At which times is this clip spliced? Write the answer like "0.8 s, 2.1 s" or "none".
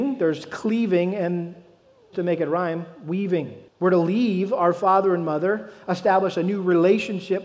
2.1 s, 3.7 s